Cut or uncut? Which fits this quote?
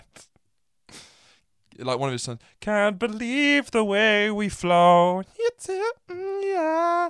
uncut